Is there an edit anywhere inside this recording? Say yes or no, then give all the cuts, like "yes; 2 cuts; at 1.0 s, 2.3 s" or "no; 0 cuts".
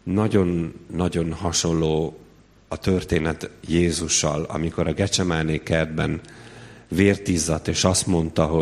no; 0 cuts